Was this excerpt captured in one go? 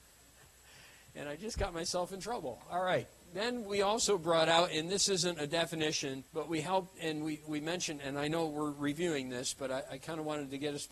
no; 1 cut; at 6.3 s

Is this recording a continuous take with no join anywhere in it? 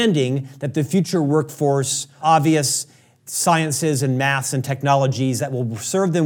no; 1 cut; at 2.2 s

